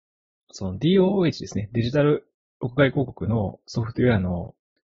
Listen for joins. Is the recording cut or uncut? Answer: uncut